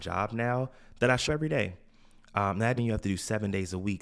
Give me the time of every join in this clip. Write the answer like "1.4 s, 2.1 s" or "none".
1.3 s, 2.8 s